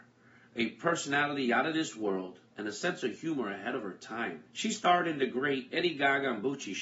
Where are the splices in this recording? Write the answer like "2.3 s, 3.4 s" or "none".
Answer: 2.5 s, 4.5 s